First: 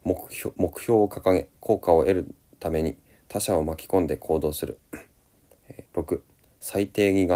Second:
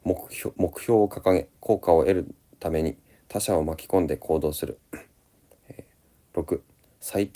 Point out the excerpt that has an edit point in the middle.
first; 1 cut; at 5.9 s

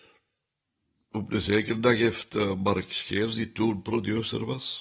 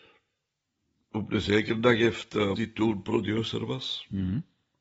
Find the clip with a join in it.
second; 1 cut; at 2.6 s

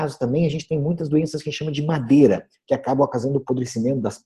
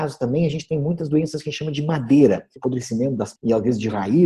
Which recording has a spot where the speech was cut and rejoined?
second; 2 cuts; at 2.6 s, 3.4 s

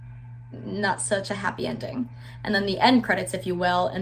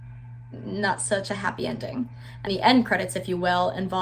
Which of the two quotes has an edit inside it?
second; 1 cut; at 2.5 s

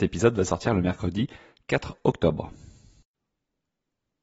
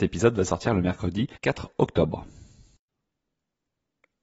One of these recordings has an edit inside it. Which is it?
second; 1 cut; at 1.4 s

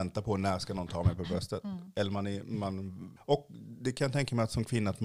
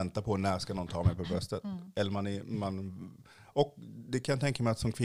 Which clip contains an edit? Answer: first; 1 cut; at 3.2 s

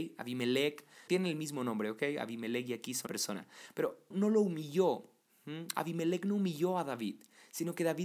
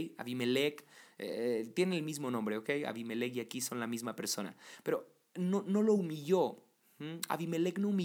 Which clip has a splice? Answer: first; 3 cuts; at 1.1 s, 3.1 s, 4.1 s

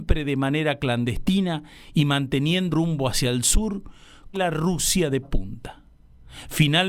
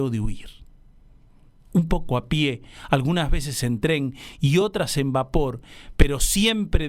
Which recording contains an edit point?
first; 3 cuts; at 2.7 s, 4.3 s, 5.2 s

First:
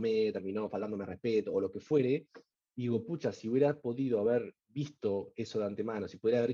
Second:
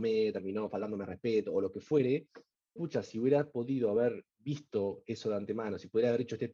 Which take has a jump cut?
second; 1 cut; at 2.8 s

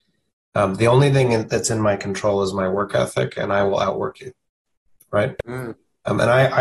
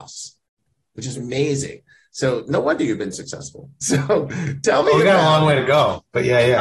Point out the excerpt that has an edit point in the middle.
second; 2 cuts; at 1.1 s, 3.1 s

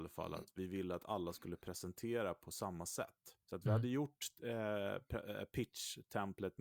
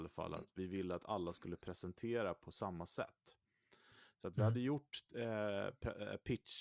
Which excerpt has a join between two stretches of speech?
first; 1 cut; at 3.4 s

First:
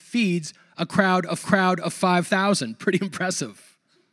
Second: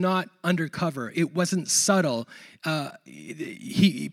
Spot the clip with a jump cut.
first; 1 cut; at 1.4 s

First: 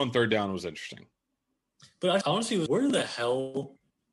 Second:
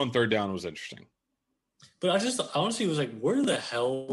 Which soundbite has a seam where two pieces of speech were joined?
first; 2 cuts; at 2.2 s, 2.7 s

